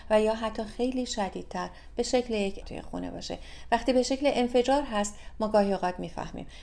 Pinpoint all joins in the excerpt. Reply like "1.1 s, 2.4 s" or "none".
2.6 s